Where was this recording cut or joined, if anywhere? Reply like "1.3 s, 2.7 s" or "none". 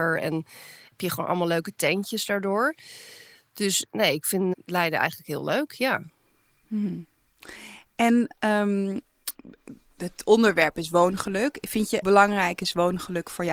4.5 s, 12.0 s